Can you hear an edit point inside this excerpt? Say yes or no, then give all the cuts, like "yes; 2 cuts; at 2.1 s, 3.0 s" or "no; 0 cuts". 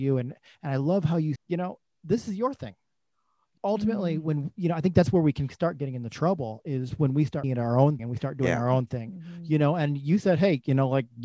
yes; 4 cuts; at 1.4 s, 3.6 s, 7.4 s, 8.0 s